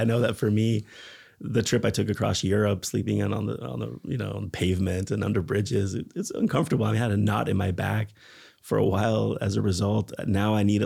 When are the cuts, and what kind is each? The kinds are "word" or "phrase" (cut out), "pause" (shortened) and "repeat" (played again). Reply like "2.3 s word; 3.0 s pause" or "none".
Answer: none